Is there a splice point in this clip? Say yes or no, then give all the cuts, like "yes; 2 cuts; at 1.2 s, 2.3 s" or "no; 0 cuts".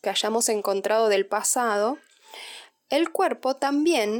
no; 0 cuts